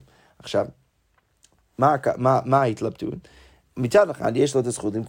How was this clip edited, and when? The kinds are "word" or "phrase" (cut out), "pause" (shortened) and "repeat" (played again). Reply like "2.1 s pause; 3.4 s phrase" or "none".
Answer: none